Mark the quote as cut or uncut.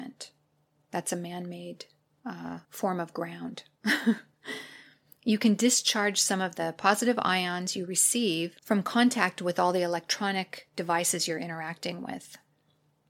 cut